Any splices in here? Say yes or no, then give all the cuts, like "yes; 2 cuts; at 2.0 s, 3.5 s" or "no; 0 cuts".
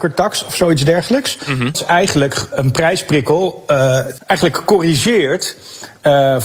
yes; 3 cuts; at 1.7 s, 2.5 s, 4.2 s